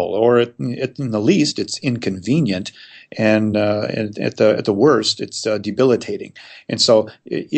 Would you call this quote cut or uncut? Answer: uncut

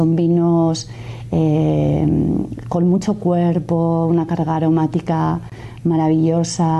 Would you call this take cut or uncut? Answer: uncut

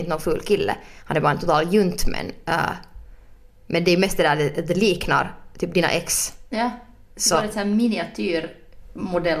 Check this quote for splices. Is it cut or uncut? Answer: uncut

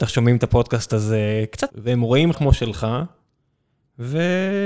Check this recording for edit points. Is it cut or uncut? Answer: cut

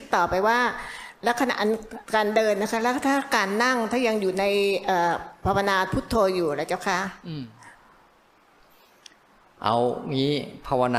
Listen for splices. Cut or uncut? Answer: cut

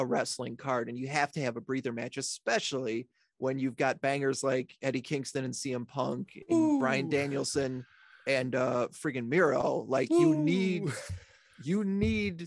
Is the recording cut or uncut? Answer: uncut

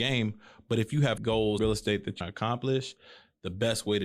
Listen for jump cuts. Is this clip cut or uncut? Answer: cut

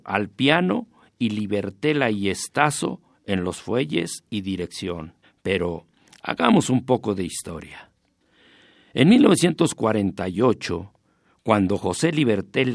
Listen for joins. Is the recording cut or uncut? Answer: cut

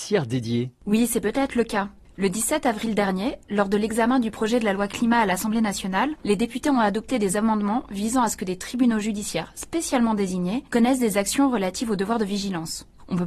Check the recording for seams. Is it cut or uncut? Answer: uncut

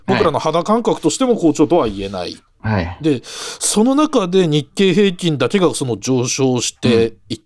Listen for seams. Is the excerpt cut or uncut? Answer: uncut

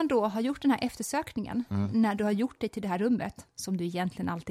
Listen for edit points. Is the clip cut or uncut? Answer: uncut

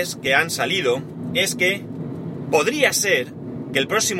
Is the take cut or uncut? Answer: uncut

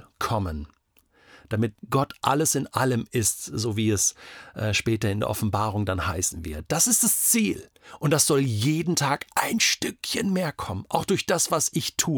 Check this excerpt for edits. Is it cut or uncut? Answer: cut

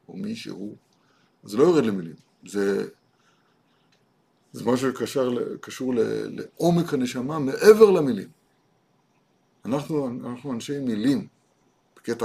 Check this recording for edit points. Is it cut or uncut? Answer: uncut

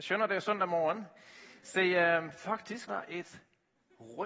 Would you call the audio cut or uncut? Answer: cut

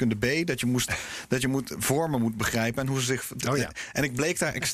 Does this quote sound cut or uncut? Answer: uncut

